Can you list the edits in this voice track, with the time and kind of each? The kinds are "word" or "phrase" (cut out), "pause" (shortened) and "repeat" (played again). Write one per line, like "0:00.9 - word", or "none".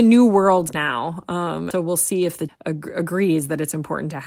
0:01.7 - word
0:02.5 - word